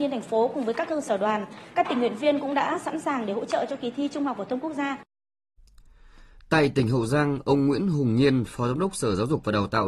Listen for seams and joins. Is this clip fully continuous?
yes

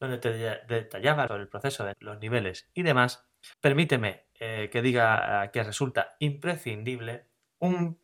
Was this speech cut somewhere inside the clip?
yes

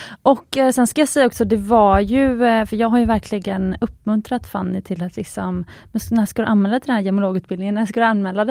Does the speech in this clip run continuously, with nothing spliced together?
yes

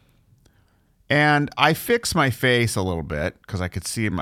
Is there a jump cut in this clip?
no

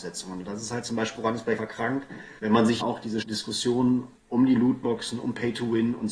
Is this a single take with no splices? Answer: no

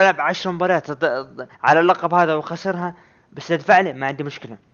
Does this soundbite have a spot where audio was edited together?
yes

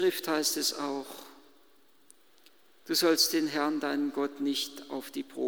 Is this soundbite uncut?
yes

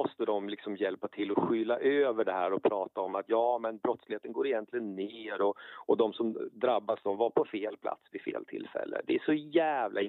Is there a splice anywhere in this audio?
no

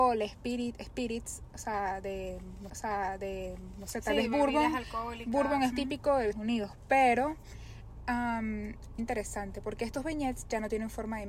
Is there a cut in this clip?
yes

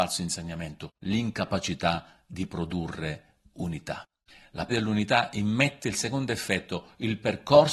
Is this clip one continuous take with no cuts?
no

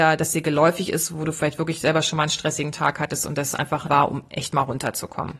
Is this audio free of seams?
no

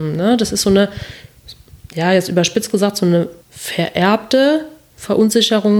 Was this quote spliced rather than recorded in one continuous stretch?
yes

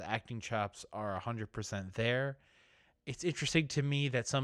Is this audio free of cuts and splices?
yes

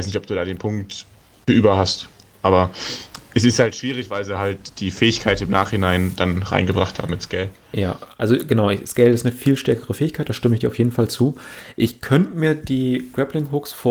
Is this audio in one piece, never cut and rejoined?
yes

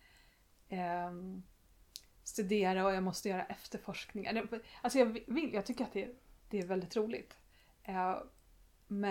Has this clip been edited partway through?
no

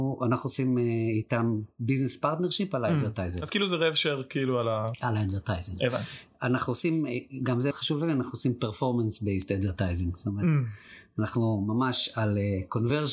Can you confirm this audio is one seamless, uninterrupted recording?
no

